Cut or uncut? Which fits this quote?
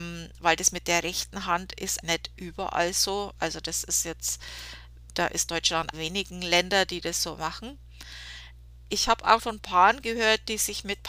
cut